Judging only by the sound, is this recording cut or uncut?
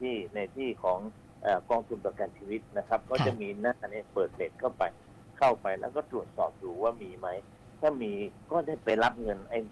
uncut